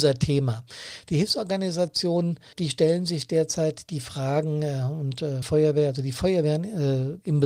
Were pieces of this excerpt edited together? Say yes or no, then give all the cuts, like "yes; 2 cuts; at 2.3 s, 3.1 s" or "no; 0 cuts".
yes; 2 cuts; at 2.5 s, 5.4 s